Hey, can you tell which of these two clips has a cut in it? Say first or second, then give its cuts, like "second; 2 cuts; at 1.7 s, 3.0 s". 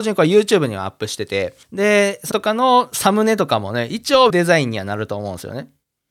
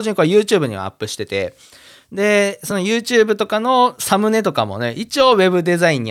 first; 3 cuts; at 1.6 s, 2.3 s, 4.3 s